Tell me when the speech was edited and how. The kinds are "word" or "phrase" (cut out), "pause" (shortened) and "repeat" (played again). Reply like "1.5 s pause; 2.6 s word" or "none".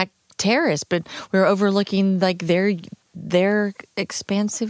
none

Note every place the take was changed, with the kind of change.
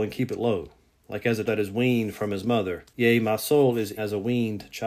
1.4 s word; 2.9 s pause; 4.0 s word

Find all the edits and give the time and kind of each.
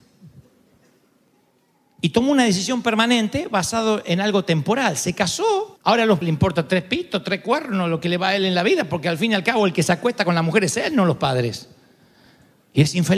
5.8 s pause; 6.2 s word

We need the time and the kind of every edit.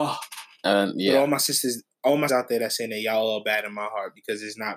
2.3 s word

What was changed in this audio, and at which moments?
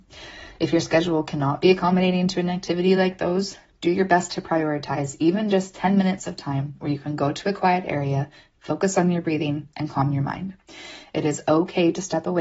none

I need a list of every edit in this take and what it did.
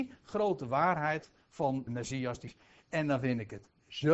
1.9 s word; 2.5 s word

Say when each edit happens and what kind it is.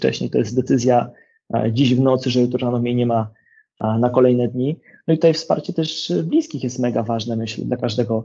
none

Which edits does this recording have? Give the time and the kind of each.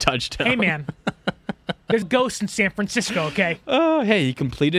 2.0 s word

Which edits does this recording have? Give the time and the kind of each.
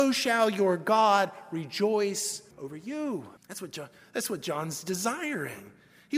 2.5 s pause; 3.4 s pause

